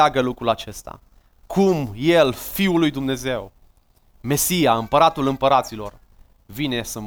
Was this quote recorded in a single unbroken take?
yes; 0 cuts

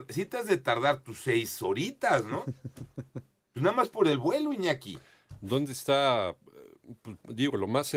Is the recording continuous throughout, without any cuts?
yes; 0 cuts

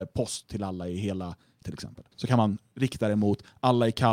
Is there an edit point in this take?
yes; 2 cuts; at 1.6 s, 2.1 s

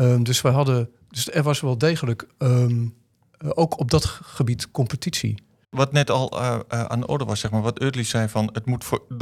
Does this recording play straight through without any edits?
yes; 0 cuts

